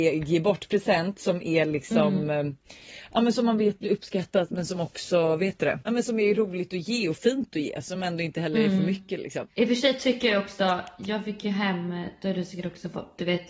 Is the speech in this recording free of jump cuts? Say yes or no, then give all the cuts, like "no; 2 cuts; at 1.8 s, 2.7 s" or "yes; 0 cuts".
yes; 0 cuts